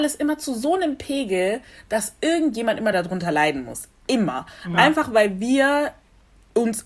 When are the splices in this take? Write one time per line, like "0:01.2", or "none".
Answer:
none